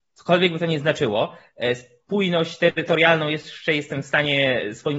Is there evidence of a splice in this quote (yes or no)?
no